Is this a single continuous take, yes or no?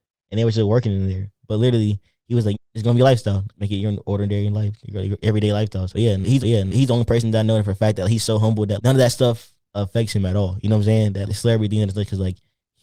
no